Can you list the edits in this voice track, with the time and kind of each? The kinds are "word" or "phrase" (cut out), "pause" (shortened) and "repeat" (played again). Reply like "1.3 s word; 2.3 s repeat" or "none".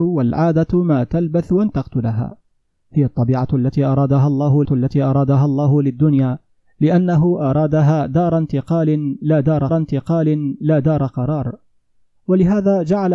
4.6 s repeat; 9.7 s repeat